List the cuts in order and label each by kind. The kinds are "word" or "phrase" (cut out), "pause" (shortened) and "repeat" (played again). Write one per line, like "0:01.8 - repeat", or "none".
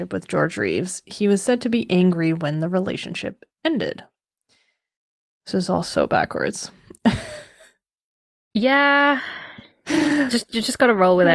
none